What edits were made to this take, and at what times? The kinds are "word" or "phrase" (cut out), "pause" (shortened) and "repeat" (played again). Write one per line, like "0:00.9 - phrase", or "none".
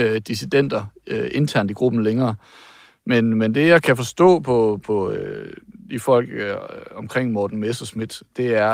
none